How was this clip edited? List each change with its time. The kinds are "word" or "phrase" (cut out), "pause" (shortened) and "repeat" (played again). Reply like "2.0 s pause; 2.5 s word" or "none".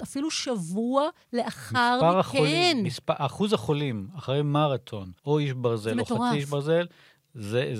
5.2 s pause